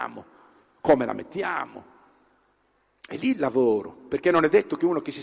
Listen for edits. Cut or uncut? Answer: uncut